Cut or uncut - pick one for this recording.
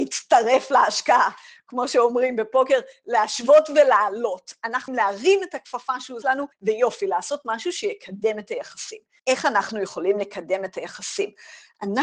cut